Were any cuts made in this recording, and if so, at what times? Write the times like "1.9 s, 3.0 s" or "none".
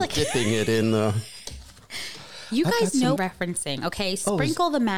3.2 s